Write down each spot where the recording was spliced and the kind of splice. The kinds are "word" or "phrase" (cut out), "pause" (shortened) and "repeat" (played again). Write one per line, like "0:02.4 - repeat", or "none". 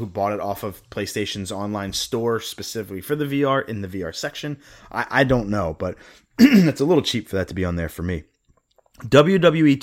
none